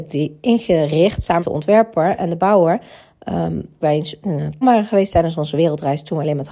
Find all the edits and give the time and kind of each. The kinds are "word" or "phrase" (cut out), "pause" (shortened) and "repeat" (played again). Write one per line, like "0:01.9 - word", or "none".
0:01.4 - word
0:03.8 - phrase
0:04.6 - word